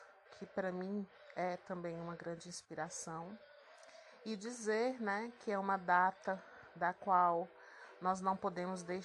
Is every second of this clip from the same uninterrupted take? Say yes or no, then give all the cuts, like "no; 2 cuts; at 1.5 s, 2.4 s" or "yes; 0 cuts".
yes; 0 cuts